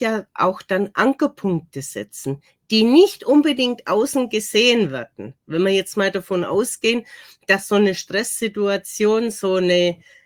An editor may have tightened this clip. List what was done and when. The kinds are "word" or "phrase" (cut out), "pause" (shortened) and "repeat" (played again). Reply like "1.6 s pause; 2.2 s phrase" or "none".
none